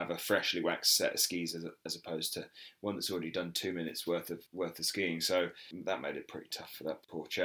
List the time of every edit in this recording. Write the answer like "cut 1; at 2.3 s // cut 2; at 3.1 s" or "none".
cut 1; at 4.5 s